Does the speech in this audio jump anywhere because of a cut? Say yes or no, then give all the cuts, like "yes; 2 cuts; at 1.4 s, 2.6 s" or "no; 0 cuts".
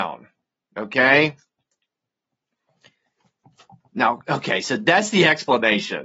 no; 0 cuts